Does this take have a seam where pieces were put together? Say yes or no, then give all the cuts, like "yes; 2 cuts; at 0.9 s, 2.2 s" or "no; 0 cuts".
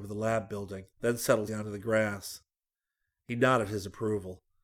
yes; 2 cuts; at 0.9 s, 1.5 s